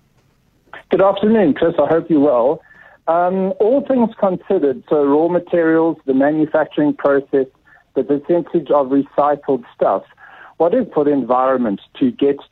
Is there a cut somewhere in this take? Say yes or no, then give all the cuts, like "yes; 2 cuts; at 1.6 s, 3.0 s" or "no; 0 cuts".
yes; 1 cut; at 10.9 s